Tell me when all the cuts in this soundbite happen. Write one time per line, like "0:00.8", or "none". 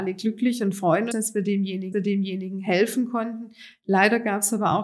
0:01.1
0:01.9